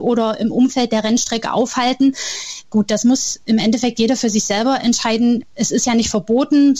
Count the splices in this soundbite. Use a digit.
0